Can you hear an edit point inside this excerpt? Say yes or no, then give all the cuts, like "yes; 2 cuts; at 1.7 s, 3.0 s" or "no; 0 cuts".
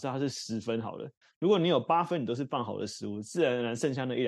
no; 0 cuts